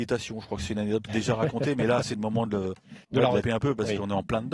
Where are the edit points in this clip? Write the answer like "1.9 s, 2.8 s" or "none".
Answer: 1.1 s, 2.0 s, 3.0 s, 3.4 s